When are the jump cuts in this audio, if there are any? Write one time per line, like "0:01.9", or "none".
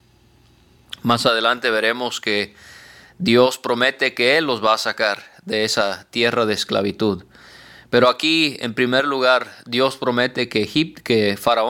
none

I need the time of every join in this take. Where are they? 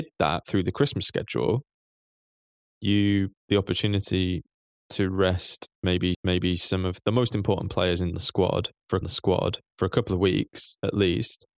0:03.4
0:04.6
0:06.1
0:09.0

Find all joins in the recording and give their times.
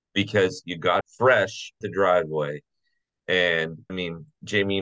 0:01.0
0:01.8
0:03.9

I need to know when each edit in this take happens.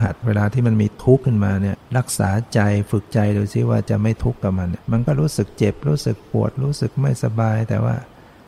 0:01.9
0:04.8

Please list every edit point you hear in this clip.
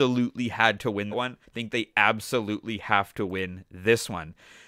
0:01.1
0:01.4

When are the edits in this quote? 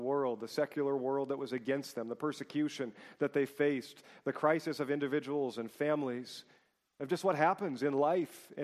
none

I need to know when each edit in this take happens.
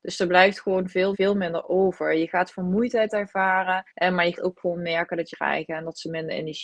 0:01.1
0:03.9
0:04.4
0:05.3

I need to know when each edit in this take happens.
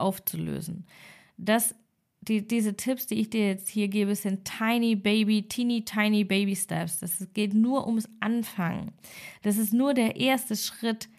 none

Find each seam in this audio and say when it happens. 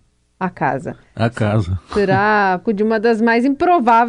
0:02.6

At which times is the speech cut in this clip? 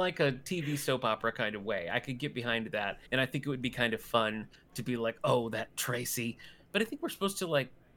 0:03.1

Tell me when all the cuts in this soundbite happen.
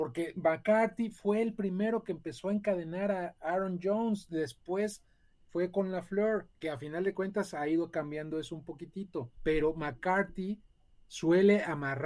0:06.5
0:09.3

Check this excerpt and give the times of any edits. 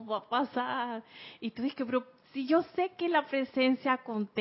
none

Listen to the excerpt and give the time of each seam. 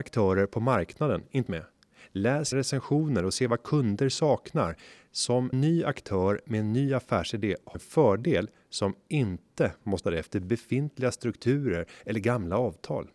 0:01.5
0:02.5
0:05.5
0:07.7
0:10.0

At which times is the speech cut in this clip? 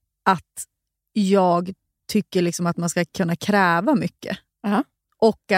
none

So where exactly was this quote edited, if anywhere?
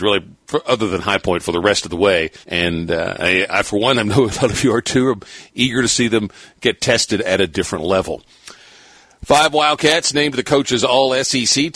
0:02.4

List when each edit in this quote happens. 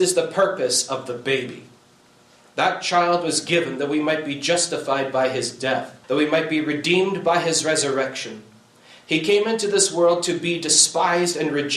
0:06.0

